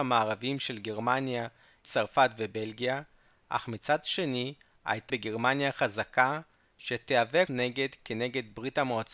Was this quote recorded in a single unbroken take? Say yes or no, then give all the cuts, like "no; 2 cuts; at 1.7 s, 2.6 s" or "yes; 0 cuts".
no; 3 cuts; at 1.8 s, 5.1 s, 7.5 s